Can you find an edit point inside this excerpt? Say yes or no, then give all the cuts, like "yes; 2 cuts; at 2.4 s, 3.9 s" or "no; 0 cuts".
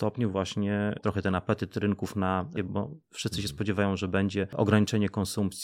yes; 2 cuts; at 1.0 s, 2.6 s